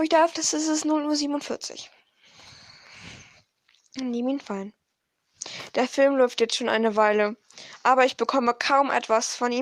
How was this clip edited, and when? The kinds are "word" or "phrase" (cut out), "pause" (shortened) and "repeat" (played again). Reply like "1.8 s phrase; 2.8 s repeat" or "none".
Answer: none